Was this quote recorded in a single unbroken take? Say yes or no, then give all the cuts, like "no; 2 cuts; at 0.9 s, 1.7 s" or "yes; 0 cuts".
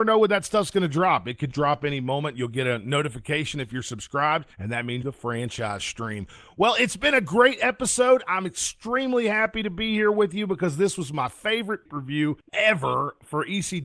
no; 4 cuts; at 1.5 s, 4.5 s, 5.0 s, 11.9 s